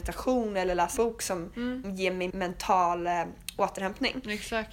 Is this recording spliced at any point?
yes; 3 cuts; at 1.0 s, 1.8 s, 2.3 s

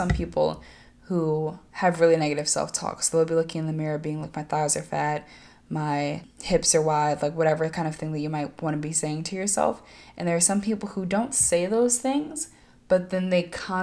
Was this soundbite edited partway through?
no; 0 cuts

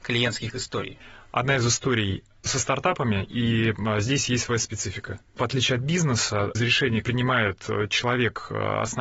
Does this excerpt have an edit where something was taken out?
yes; 4 cuts; at 2.5 s, 5.4 s, 6.6 s, 7.0 s

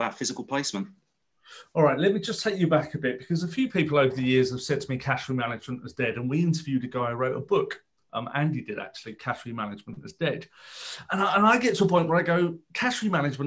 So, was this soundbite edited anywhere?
no; 0 cuts

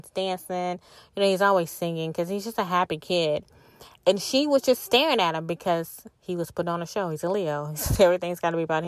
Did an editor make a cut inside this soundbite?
yes; 1 cut; at 6.1 s

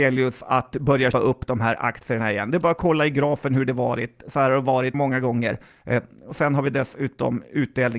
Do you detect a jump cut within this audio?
yes; 2 cuts; at 1.1 s, 4.9 s

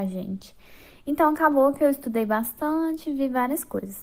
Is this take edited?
no; 0 cuts

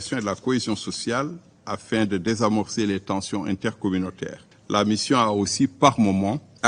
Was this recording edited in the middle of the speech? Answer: no; 0 cuts

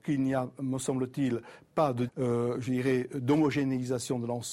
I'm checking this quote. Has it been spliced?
yes; 1 cut; at 2.1 s

